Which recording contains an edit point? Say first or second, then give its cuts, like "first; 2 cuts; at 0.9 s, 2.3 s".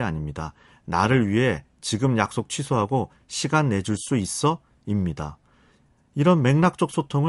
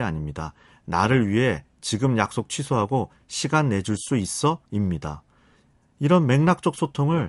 second; 1 cut; at 4.7 s